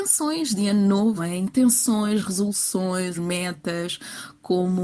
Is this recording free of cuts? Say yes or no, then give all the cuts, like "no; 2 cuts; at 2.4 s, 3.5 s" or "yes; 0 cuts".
no; 2 cuts; at 1.2 s, 3.1 s